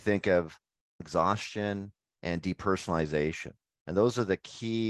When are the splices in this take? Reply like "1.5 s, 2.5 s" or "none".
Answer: 1.0 s